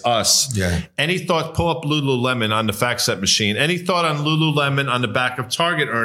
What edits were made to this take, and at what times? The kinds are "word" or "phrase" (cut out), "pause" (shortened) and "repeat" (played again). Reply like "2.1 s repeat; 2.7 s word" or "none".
none